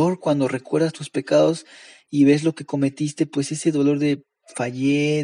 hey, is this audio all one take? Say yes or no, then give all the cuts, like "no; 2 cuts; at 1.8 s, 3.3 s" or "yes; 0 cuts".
yes; 0 cuts